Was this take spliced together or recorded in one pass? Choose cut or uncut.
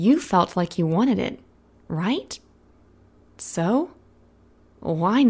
uncut